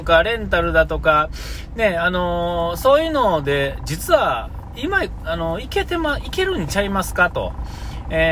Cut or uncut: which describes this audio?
uncut